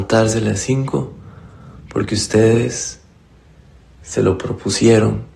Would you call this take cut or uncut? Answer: uncut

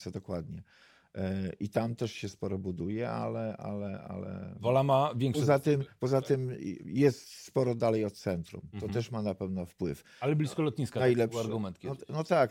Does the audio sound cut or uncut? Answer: uncut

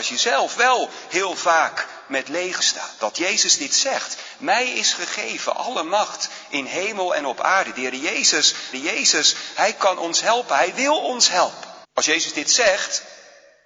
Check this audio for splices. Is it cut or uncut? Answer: cut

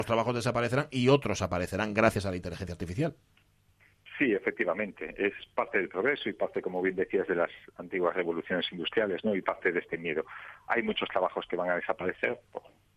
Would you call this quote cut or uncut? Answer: uncut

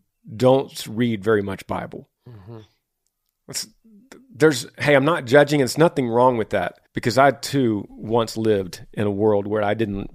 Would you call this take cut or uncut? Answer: cut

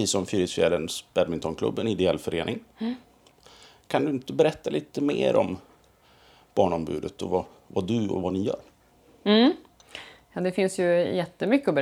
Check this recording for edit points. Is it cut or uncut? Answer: uncut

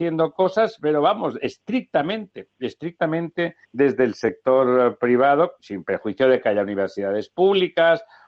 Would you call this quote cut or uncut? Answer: cut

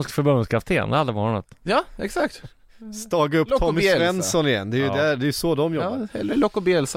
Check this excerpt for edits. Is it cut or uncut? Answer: uncut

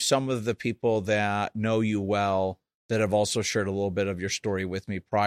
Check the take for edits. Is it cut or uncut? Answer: uncut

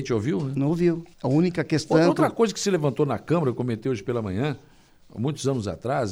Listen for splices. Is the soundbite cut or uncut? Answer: cut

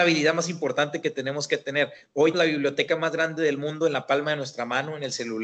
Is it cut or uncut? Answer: cut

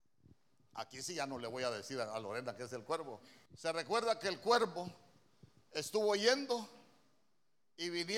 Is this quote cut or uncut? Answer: cut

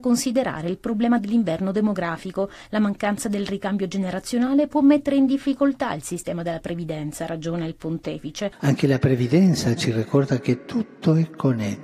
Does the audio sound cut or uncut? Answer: uncut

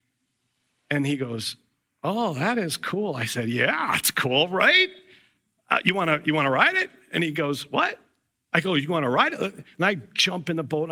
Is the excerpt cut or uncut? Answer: uncut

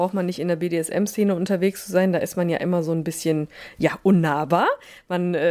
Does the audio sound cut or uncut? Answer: uncut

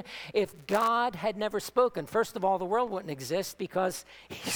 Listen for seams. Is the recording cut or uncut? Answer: uncut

